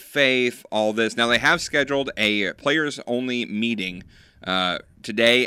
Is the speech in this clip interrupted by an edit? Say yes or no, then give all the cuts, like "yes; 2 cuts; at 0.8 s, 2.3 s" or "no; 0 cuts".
no; 0 cuts